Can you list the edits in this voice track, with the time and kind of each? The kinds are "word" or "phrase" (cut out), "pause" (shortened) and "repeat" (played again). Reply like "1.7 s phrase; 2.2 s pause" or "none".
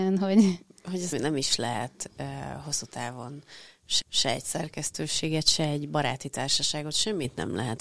1.1 s word; 4.0 s repeat